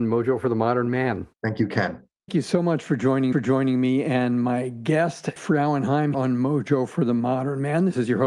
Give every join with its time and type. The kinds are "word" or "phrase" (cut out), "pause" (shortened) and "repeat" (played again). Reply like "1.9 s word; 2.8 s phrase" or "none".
1.3 s pause; 2.3 s word; 3.3 s repeat; 5.4 s word; 6.1 s word